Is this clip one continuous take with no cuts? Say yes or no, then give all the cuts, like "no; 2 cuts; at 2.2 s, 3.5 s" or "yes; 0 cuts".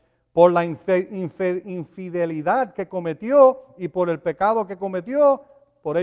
yes; 0 cuts